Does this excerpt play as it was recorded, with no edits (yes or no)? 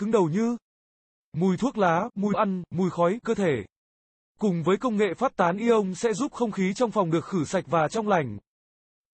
no